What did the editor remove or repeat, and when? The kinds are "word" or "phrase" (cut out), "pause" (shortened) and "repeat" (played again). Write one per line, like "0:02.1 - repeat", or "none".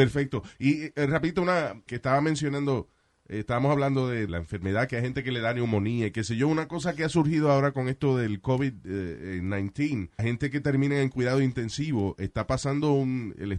0:01.9 - word
0:04.3 - word
0:10.2 - word